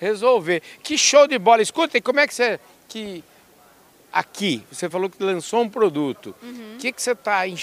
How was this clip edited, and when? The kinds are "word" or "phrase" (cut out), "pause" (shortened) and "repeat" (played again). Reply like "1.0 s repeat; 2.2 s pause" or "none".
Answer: none